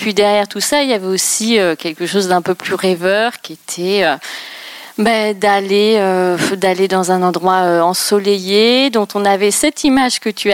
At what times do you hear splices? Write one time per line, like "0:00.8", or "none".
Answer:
none